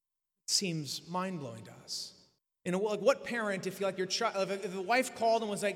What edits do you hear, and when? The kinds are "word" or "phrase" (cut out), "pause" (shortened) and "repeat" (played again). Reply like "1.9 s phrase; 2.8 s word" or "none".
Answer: 2.4 s pause